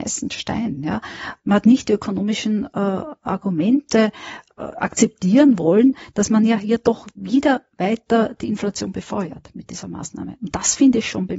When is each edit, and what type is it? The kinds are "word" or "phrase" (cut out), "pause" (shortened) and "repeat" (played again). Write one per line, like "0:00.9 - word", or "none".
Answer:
none